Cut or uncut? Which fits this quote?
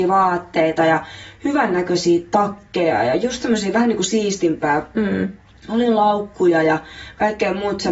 uncut